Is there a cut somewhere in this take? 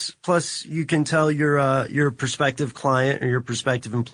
no; 0 cuts

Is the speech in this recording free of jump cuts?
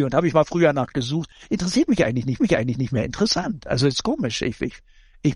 no; 1 cut; at 2.4 s

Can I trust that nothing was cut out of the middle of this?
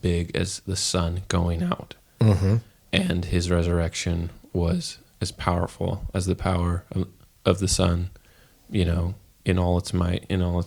yes; 0 cuts

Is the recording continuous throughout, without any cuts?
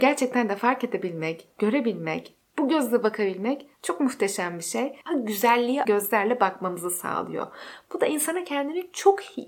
no; 3 cuts; at 3.7 s, 5.0 s, 5.8 s

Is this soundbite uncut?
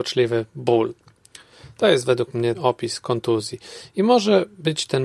no; 1 cut; at 2.5 s

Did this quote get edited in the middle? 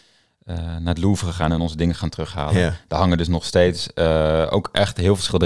no; 0 cuts

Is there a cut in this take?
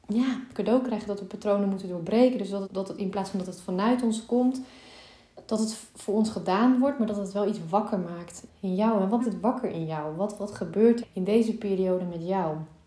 yes; 4 cuts; at 2.6 s, 8.5 s, 9.2 s, 11.0 s

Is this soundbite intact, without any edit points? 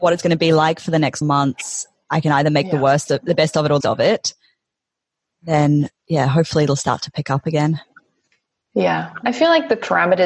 no; 2 cuts; at 1.2 s, 3.8 s

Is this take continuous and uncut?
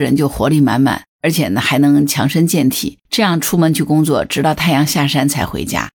no; 2 cuts; at 1.1 s, 3.0 s

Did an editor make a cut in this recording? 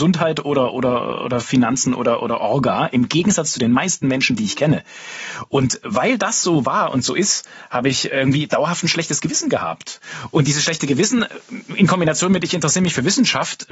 no; 0 cuts

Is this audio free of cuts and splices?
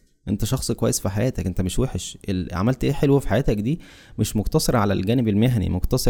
yes; 0 cuts

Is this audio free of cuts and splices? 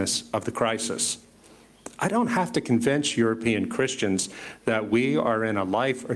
yes; 0 cuts

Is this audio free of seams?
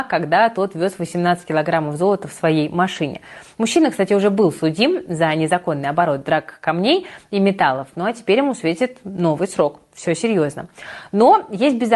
yes; 0 cuts

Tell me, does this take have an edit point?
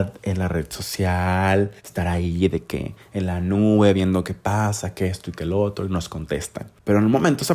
yes; 1 cut; at 1.8 s

